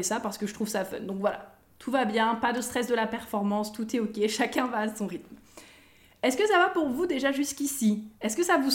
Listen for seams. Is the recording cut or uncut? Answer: uncut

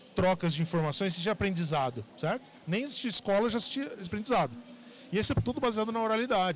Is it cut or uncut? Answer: cut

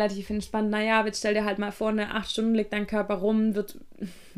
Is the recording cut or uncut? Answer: uncut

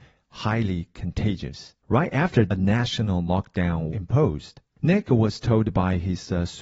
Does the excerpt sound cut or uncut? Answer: cut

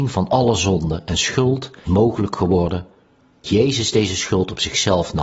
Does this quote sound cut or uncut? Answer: cut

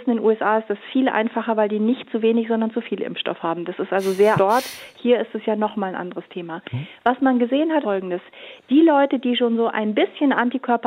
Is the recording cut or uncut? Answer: cut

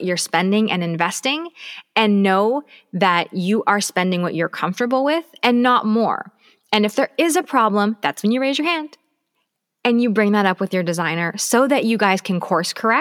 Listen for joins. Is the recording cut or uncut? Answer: uncut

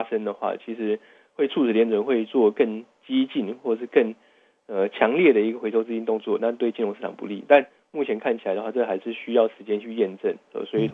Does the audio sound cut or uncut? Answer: uncut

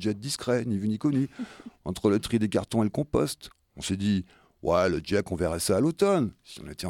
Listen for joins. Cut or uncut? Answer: uncut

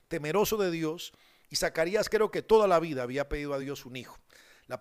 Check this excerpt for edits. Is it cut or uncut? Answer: uncut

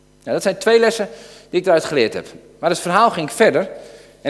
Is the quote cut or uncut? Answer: uncut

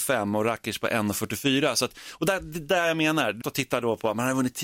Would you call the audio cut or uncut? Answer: cut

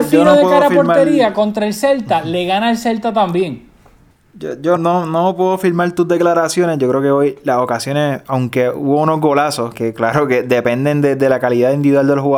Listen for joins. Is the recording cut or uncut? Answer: cut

